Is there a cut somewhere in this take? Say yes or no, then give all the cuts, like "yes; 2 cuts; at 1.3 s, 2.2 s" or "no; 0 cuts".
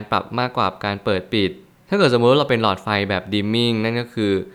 no; 0 cuts